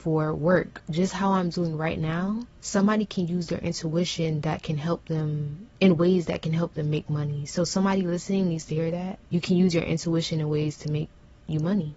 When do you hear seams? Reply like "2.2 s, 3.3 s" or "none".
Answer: 2.5 s, 5.7 s, 9.3 s